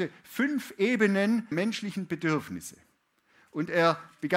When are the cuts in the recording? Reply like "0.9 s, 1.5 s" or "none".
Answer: 1.5 s